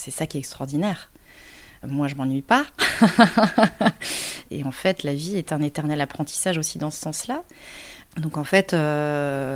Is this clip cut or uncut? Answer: uncut